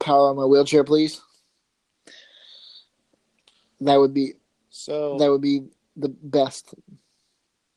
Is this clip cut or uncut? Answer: uncut